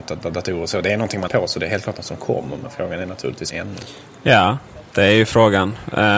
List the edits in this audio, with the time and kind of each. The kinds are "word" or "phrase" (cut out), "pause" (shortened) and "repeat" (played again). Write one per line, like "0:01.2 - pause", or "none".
0:01.3 - word
0:03.5 - phrase